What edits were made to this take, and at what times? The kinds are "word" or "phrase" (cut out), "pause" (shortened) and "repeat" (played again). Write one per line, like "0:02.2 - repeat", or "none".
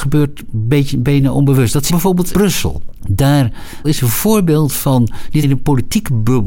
0:01.9 - word
0:02.3 - word
0:03.8 - word
0:05.4 - word